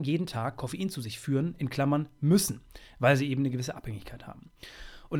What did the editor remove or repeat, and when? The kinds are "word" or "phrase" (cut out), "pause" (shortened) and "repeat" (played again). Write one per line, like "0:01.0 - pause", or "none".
none